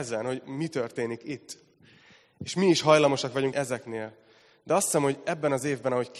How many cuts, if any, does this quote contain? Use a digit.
1